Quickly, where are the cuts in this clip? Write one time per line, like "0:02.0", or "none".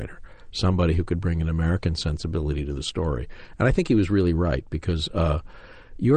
none